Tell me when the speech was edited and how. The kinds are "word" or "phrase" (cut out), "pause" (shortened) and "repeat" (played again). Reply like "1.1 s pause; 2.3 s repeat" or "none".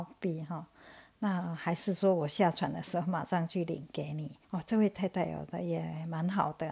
4.4 s pause